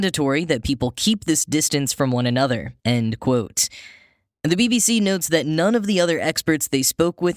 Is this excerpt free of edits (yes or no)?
no